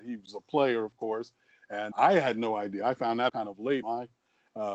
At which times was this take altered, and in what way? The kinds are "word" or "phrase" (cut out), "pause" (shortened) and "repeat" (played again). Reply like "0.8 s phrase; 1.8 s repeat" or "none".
1.9 s word; 3.3 s word; 3.8 s word